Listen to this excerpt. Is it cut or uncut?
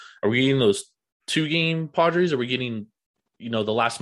uncut